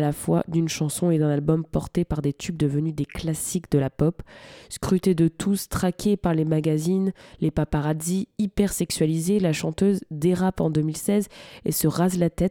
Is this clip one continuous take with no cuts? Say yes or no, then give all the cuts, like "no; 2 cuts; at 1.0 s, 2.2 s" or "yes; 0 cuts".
yes; 0 cuts